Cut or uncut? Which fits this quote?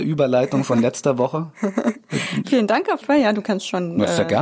cut